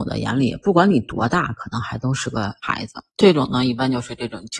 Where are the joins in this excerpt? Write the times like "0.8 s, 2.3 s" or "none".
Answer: 3.1 s